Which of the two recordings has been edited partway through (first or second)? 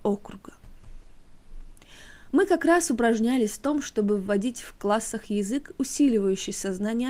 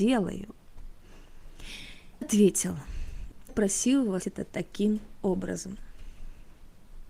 second